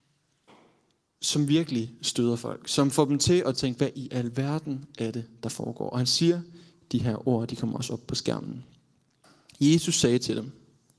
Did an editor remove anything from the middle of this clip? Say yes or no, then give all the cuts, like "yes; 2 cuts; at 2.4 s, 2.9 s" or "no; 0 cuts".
no; 0 cuts